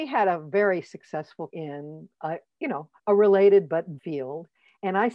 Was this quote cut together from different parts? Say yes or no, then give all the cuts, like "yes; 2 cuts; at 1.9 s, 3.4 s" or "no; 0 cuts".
yes; 3 cuts; at 1.5 s, 3.0 s, 4.0 s